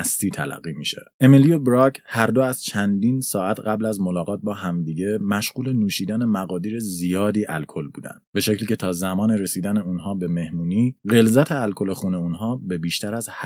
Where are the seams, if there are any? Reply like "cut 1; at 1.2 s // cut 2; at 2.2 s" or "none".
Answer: cut 1; at 1.1 s // cut 2; at 8.2 s // cut 3; at 11.0 s